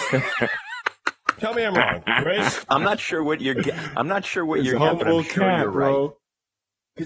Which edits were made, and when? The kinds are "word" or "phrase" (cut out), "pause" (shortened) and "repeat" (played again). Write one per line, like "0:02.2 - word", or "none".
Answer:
0:02.7 - word
0:04.8 - word